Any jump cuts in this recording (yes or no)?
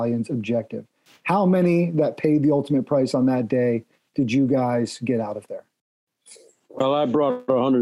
no